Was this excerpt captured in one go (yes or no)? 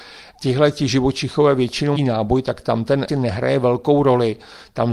no